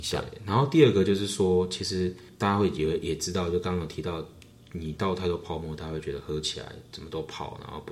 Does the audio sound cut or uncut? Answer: uncut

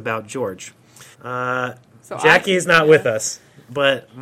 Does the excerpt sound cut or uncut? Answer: cut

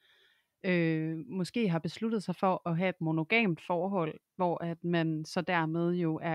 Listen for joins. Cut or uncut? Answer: uncut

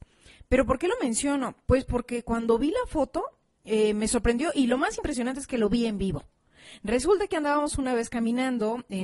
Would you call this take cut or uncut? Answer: uncut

